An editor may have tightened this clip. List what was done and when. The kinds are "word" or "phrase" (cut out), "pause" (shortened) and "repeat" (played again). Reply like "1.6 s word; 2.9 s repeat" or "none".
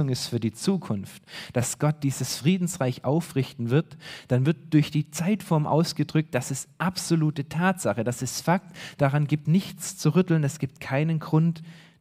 9.5 s word